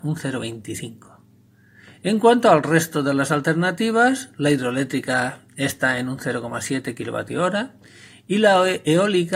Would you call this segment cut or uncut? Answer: uncut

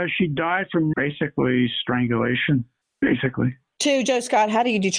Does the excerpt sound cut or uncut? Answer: cut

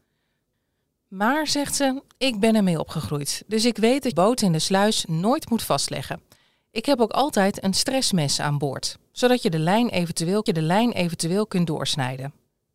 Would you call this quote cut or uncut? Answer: cut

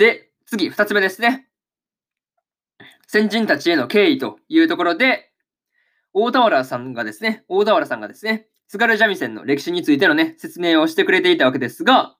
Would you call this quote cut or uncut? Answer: uncut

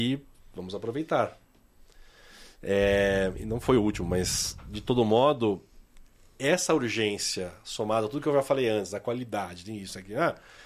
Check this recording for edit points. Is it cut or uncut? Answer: uncut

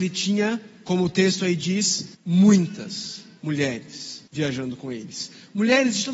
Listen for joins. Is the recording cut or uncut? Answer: cut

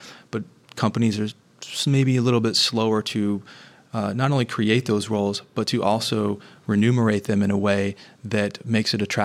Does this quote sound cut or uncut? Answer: uncut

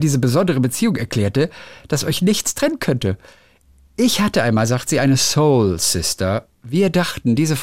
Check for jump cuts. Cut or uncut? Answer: uncut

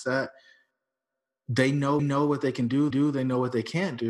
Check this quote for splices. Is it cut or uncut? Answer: cut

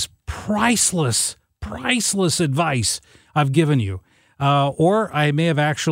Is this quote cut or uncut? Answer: uncut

